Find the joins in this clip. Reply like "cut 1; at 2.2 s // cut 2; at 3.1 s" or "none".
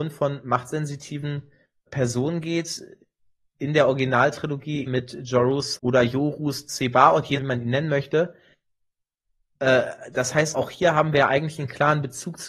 cut 1; at 1.9 s // cut 2; at 4.9 s // cut 3; at 5.8 s // cut 4; at 7.4 s // cut 5; at 10.5 s